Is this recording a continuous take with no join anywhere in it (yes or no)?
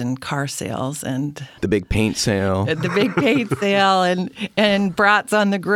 no